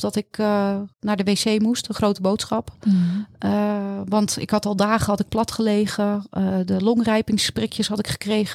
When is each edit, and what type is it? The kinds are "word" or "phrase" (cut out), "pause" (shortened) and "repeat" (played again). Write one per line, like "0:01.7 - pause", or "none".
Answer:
0:00.9 - pause